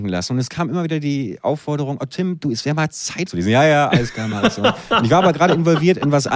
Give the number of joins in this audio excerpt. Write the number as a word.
one